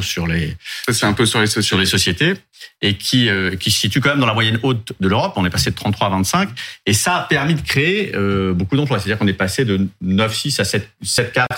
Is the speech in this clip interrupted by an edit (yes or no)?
no